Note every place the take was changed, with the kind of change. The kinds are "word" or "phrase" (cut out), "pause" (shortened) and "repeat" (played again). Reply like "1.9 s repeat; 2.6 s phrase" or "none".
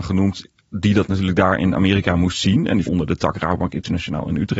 2.9 s word